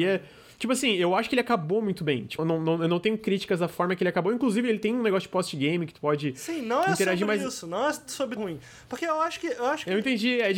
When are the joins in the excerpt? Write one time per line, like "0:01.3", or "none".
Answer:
0:02.4
0:08.4